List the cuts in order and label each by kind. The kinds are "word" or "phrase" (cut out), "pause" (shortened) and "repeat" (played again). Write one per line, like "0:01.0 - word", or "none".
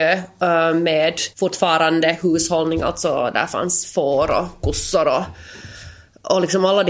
0:01.3 - pause